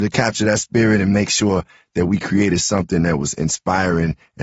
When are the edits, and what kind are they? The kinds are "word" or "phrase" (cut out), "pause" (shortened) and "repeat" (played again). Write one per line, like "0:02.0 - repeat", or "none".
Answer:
none